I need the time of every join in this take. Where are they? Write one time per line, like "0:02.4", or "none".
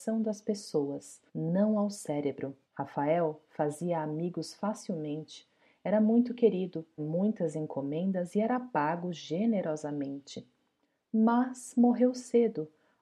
0:01.3
0:02.6
0:07.0

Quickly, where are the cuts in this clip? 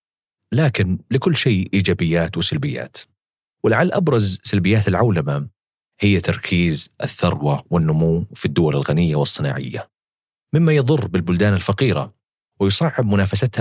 none

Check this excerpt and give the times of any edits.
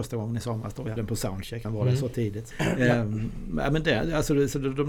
0:01.0
0:01.6
0:02.5

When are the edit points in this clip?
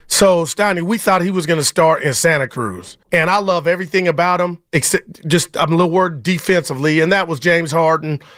0:03.0
0:04.7

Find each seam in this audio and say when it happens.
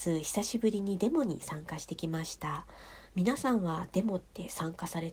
none

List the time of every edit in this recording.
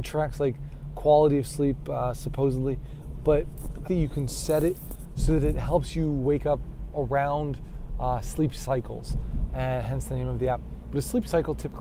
0:03.8

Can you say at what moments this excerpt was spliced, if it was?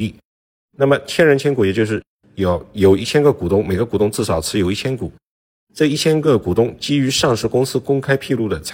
none

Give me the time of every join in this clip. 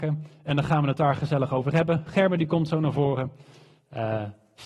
none

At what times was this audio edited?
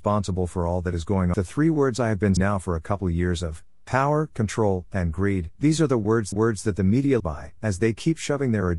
0:01.3
0:02.4
0:05.6
0:06.3
0:07.2

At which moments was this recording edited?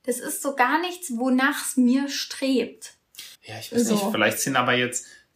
0:03.3

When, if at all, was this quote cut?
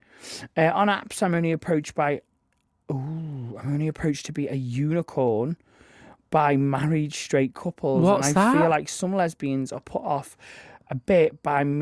none

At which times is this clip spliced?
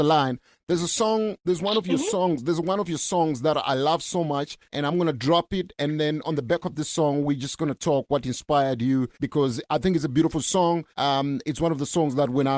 0:04.6
0:09.1
0:10.9

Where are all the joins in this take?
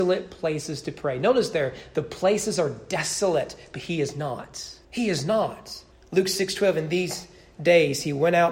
0:04.8
0:05.9

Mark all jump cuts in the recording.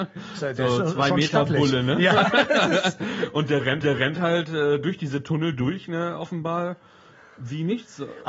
0:03.8

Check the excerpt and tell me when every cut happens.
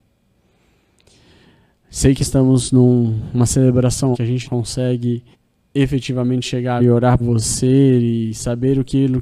0:02.2
0:04.1
0:04.4
0:05.3
0:06.8
0:07.2

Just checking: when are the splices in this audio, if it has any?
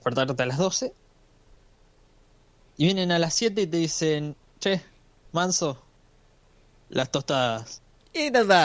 none

